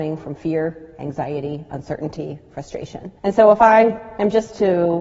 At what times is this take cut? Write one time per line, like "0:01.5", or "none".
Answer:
0:03.2